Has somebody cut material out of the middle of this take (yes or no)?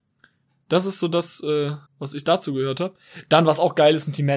yes